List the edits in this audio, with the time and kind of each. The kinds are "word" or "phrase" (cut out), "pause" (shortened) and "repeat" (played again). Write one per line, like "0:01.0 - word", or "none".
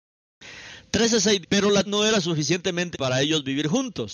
0:01.4 - word
0:01.9 - word
0:02.9 - word